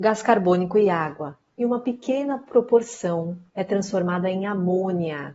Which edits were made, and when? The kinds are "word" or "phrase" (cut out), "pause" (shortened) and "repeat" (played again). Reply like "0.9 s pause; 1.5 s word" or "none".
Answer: 3.5 s pause